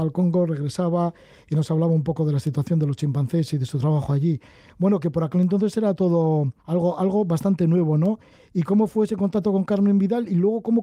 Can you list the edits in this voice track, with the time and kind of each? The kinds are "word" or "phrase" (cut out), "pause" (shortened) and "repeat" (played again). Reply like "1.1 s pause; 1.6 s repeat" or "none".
6.6 s pause